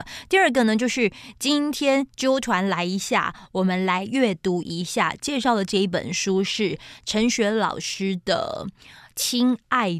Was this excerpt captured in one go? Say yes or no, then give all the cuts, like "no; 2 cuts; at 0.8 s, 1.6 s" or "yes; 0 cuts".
yes; 0 cuts